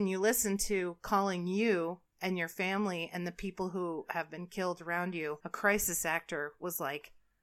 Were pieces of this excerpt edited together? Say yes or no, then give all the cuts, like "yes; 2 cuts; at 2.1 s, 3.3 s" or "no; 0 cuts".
no; 0 cuts